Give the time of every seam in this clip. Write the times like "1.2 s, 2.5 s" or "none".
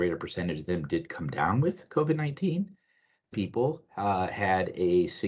3.3 s